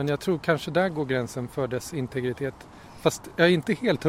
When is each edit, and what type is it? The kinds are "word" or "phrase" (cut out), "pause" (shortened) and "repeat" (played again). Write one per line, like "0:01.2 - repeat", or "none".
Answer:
none